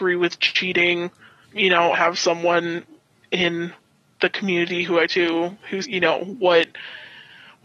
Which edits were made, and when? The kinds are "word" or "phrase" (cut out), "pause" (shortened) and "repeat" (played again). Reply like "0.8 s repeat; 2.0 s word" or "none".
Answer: 1.4 s word; 1.9 s phrase; 5.1 s word; 5.8 s word